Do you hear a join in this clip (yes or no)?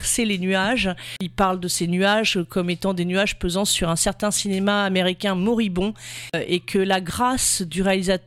no